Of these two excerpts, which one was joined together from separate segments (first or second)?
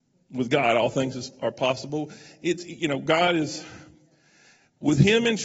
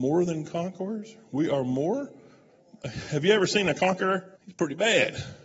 second